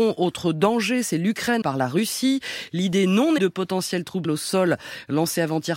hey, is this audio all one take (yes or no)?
no